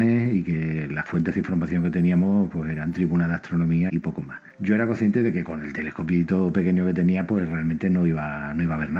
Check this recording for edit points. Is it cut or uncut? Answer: cut